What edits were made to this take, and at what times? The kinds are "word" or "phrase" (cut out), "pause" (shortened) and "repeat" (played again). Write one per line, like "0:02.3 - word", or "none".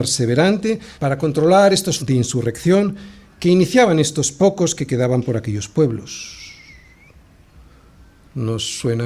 0:00.9 - pause
0:02.0 - word